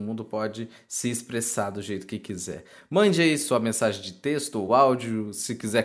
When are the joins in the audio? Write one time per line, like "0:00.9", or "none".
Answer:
none